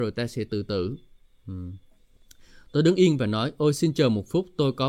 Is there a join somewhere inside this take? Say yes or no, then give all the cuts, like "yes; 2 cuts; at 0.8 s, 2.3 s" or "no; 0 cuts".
no; 0 cuts